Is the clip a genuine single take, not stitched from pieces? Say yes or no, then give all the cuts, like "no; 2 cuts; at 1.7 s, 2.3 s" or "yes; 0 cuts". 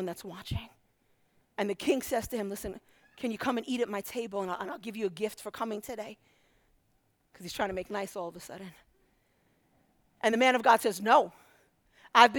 yes; 0 cuts